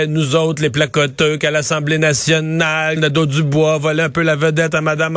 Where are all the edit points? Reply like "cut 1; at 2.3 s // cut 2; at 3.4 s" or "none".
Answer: cut 1; at 3.0 s